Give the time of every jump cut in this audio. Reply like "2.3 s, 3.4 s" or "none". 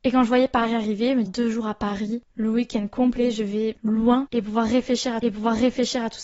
1.3 s, 3.8 s, 5.2 s